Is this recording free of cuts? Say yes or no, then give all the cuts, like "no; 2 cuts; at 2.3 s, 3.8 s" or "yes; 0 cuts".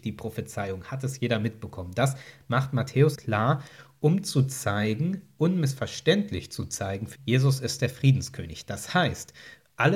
no; 2 cuts; at 3.2 s, 7.2 s